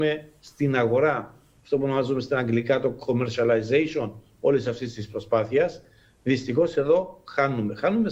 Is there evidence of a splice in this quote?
no; 0 cuts

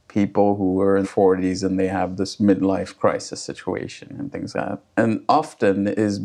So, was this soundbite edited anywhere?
yes; 2 cuts; at 1.0 s, 4.5 s

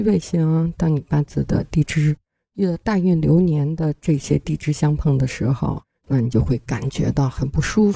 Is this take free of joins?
yes; 0 cuts

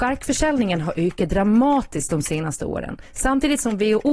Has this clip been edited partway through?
no; 0 cuts

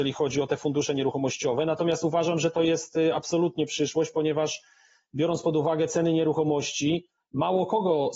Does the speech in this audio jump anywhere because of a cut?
no; 0 cuts

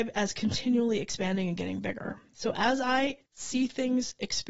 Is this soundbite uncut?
no; 1 cut; at 3.3 s

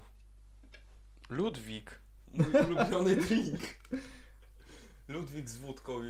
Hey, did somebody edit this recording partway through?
no; 0 cuts

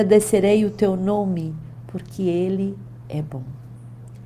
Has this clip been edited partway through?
no; 0 cuts

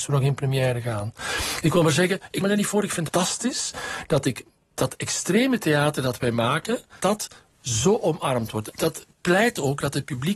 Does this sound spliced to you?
yes; 4 cuts; at 2.4 s, 3.1 s, 7.0 s, 8.7 s

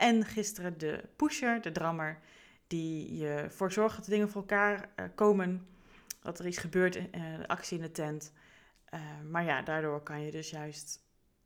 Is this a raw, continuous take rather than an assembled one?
yes; 0 cuts

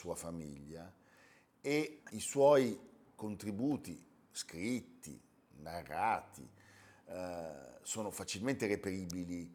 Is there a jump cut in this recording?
no; 0 cuts

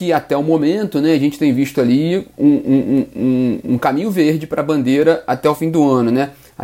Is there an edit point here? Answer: no; 0 cuts

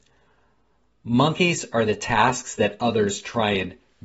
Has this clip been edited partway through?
no; 0 cuts

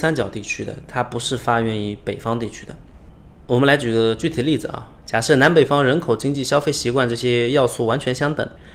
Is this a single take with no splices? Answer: yes; 0 cuts

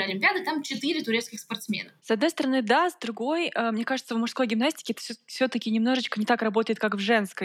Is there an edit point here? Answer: yes; 1 cut; at 2.0 s

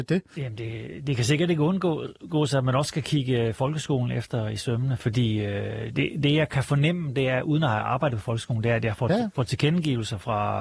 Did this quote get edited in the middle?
no; 0 cuts

